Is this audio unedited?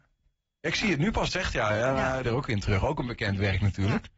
no; 2 cuts; at 1.3 s, 2.2 s

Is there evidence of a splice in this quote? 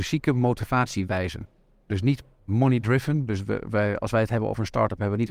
no; 0 cuts

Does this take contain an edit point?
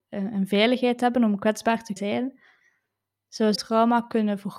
yes; 2 cuts; at 2.0 s, 3.6 s

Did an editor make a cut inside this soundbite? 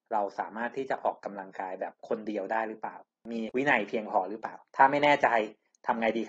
yes; 1 cut; at 4.7 s

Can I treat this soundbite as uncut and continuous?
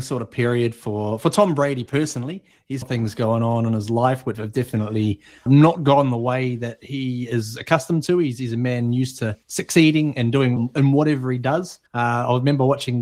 no; 6 cuts; at 2.8 s, 4.3 s, 5.5 s, 9.4 s, 10.6 s, 11.9 s

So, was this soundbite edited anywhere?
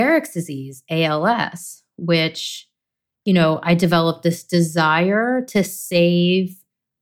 no; 0 cuts

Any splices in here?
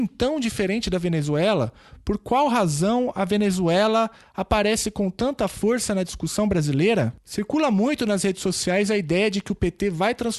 no; 0 cuts

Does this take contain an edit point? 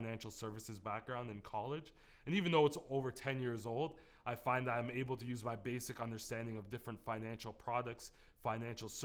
no; 0 cuts

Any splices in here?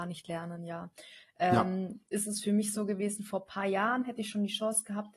no; 0 cuts

